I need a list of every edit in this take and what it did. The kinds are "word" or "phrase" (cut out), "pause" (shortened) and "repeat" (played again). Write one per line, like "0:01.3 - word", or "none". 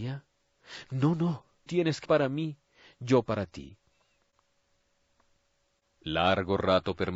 0:01.7 - word
0:02.1 - word